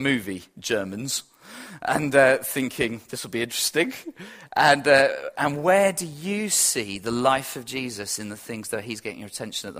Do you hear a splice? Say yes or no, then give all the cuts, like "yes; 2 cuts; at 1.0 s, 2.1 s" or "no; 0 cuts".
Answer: no; 0 cuts